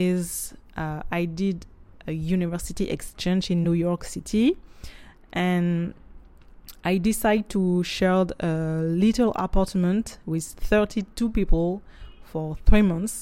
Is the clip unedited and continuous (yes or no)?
yes